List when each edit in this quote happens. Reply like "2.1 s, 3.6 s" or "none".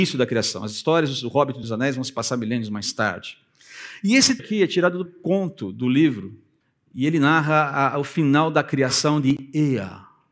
1.6 s, 4.4 s, 5.1 s, 6.6 s